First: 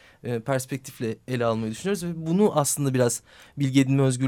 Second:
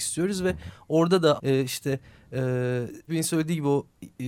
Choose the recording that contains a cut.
second; 2 cuts; at 1.4 s, 3.1 s

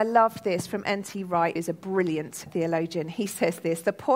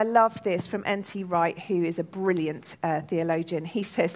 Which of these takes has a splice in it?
first; 2 cuts; at 1.6 s, 2.5 s

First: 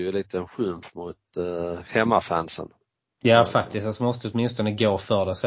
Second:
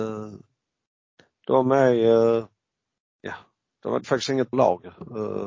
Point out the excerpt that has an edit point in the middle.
second; 2 cuts; at 4.0 s, 4.5 s

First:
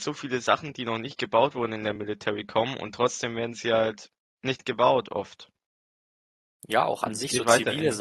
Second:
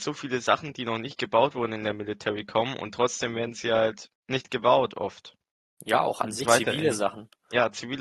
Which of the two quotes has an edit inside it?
second; 3 cuts; at 4.2 s, 5.6 s, 6.4 s

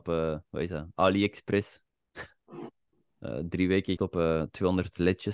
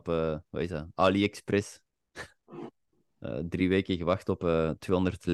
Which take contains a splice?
first; 1 cut; at 4.0 s

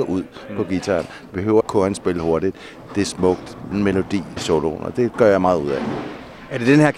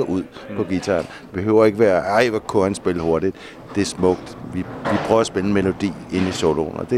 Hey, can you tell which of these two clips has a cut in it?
first; 3 cuts; at 1.6 s, 3.7 s, 4.4 s

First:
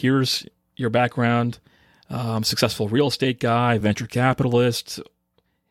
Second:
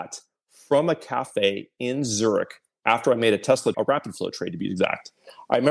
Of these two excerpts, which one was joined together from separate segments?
second; 1 cut; at 3.7 s

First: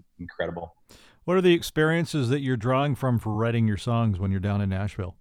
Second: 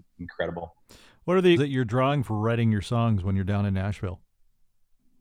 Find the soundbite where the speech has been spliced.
second; 2 cuts; at 1.6 s, 2.2 s

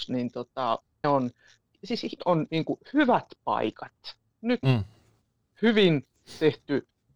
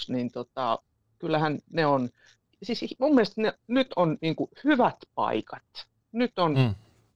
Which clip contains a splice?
first; 3 cuts; at 1.0 s, 2.2 s, 4.6 s

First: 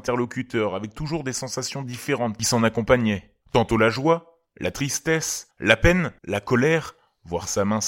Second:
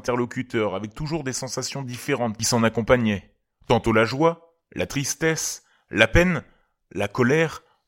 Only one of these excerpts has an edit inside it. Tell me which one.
first; 3 cuts; at 3.4 s, 5.5 s, 6.2 s

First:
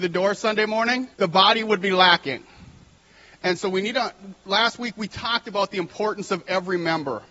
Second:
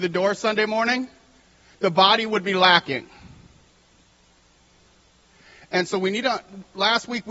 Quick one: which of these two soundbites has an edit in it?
first; 2 cuts; at 1.1 s, 3.0 s

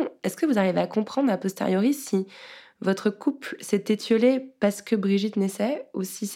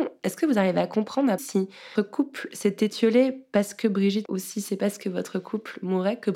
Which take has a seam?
second; 3 cuts; at 1.4 s, 2.0 s, 4.3 s

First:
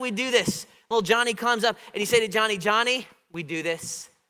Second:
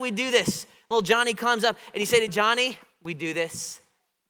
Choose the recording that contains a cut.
second; 1 cut; at 2.3 s

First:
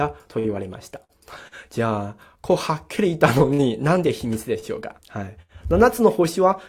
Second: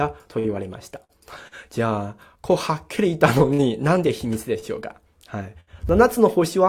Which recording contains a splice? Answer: first; 1 cut; at 5.0 s

